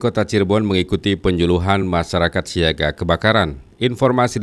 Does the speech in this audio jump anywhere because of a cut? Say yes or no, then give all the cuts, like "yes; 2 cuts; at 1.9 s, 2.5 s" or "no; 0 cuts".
no; 0 cuts